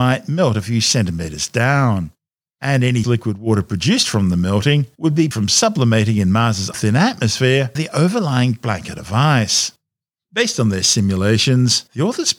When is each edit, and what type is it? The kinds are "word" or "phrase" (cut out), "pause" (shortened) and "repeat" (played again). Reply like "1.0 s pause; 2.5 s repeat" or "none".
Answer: 3.0 s word; 5.3 s word; 6.7 s word; 7.8 s word